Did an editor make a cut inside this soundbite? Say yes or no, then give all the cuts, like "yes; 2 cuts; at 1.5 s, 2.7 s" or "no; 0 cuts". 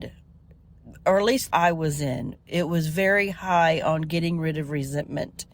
yes; 1 cut; at 1.5 s